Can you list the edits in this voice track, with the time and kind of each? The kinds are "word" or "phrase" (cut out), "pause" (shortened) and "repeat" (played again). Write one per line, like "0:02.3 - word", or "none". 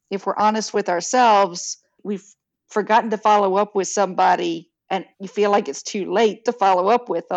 0:05.1 - pause